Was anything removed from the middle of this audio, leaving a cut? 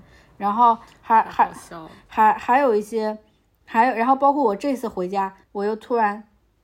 yes; 1 cut; at 5.4 s

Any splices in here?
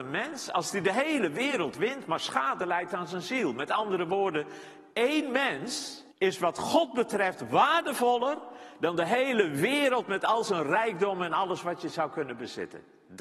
yes; 2 cuts; at 4.9 s, 6.1 s

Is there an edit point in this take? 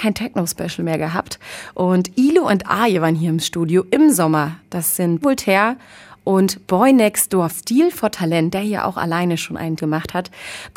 yes; 3 cuts; at 5.2 s, 7.5 s, 9.8 s

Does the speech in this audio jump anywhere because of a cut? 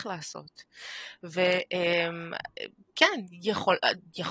no; 0 cuts

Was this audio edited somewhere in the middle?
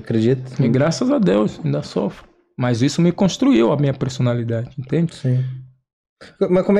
no; 0 cuts

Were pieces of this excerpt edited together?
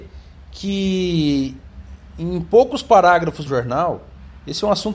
yes; 1 cut; at 3.5 s

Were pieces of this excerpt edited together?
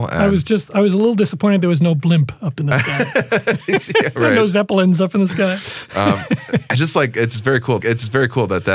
yes; 1 cut; at 7.8 s

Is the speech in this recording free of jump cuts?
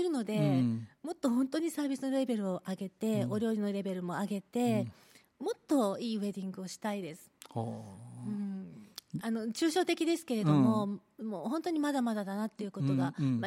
yes; 0 cuts

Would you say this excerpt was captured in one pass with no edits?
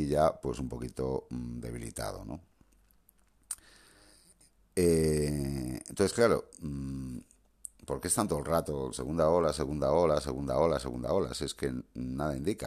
yes; 0 cuts

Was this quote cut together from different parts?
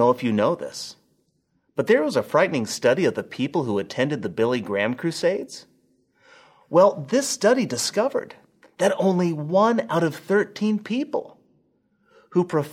no; 0 cuts

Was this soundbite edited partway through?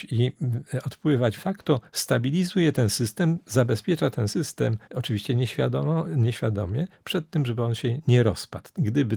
yes; 2 cuts; at 1.4 s, 4.8 s

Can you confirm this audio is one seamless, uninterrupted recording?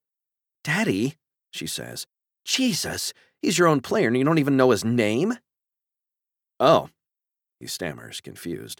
yes; 0 cuts

